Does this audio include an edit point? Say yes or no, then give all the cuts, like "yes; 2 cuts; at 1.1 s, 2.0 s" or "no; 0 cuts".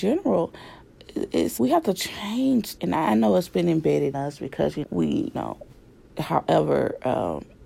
yes; 5 cuts; at 1.6 s, 2.8 s, 4.1 s, 4.8 s, 5.3 s